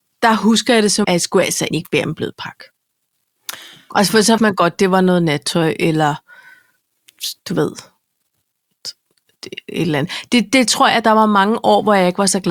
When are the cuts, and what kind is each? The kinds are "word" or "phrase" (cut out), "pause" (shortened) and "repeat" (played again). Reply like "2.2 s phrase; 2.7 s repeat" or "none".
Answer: 1.0 s word; 1.7 s word; 4.4 s word